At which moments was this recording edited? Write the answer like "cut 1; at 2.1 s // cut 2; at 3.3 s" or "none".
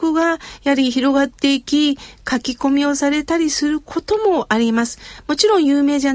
none